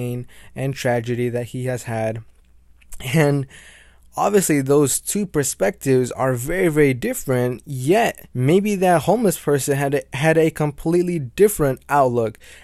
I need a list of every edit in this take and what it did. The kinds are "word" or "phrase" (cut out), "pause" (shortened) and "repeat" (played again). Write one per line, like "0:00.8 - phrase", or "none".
0:08.3 - pause